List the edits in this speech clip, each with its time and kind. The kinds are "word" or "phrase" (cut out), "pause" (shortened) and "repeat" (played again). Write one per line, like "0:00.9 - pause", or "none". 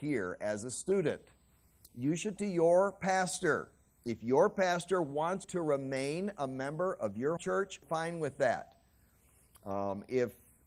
0:02.4 - word
0:05.4 - word
0:07.4 - word
0:07.8 - word